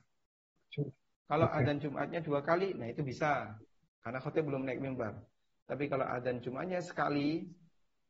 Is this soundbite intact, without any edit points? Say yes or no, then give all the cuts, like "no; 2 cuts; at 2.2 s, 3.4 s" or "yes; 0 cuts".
yes; 0 cuts